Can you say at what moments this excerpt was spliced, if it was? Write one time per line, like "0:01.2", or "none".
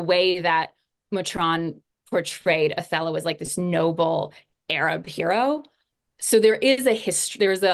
none

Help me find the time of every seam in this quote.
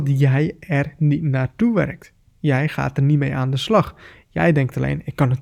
none

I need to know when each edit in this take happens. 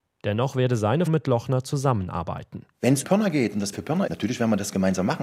0:01.1
0:03.0
0:03.7
0:04.1

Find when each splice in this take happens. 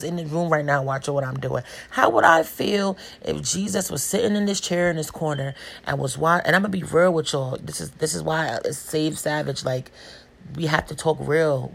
none

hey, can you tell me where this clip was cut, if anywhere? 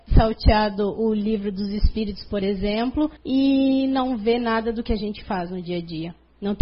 0:03.2

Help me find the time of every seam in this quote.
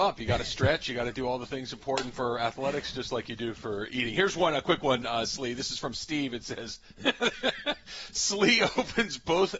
none

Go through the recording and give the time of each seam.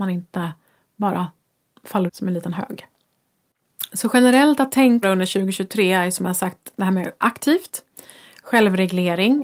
0:02.1
0:05.0
0:07.2

